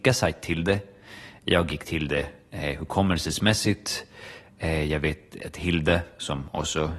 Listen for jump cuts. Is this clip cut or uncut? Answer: uncut